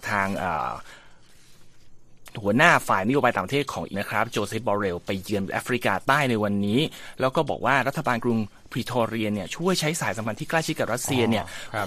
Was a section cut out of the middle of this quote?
yes; 1 cut; at 3.9 s

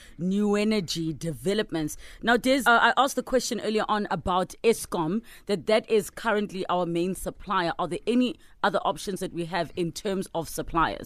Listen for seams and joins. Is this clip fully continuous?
no; 1 cut; at 2.6 s

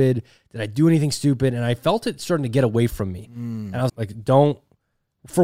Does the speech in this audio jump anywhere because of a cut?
yes; 1 cut; at 3.9 s

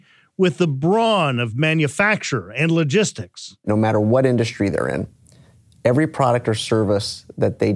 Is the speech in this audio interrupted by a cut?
no; 0 cuts

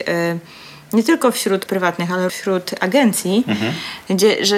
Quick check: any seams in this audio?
yes; 2 cuts; at 1.7 s, 2.3 s

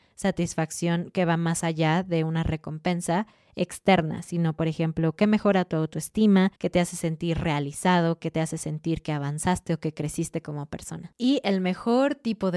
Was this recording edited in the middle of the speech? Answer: yes; 1 cut; at 6.6 s

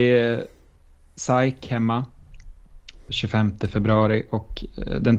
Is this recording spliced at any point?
yes; 1 cut; at 3.1 s

